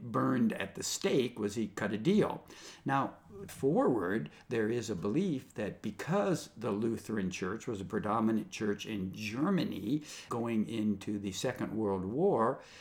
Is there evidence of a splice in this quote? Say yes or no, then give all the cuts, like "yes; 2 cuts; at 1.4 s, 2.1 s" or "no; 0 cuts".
yes; 2 cuts; at 3.5 s, 10.3 s